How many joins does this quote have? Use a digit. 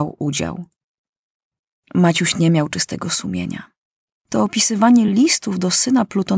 0